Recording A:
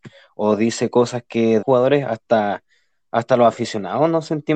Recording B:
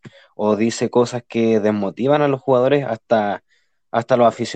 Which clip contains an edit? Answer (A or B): A